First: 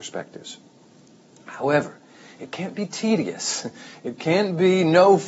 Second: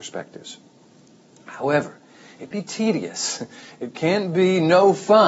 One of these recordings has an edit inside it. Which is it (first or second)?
second